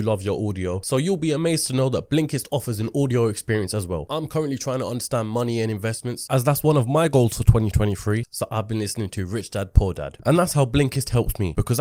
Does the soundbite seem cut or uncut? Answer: uncut